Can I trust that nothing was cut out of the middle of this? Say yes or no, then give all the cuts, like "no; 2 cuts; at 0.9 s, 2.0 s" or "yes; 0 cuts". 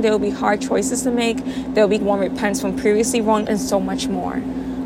no; 2 cuts; at 2.0 s, 3.5 s